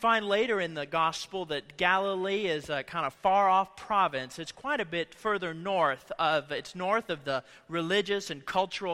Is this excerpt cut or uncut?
uncut